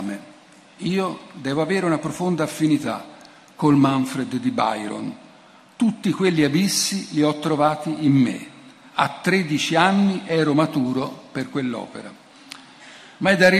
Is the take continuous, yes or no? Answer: yes